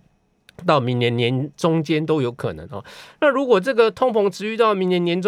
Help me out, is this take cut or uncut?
uncut